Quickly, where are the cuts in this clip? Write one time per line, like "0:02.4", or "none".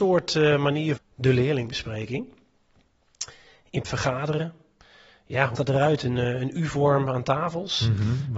0:01.0
0:03.8
0:05.6